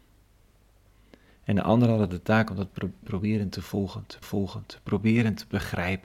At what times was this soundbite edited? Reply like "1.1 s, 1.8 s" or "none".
3.0 s, 4.2 s